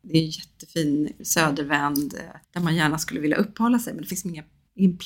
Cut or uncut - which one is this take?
cut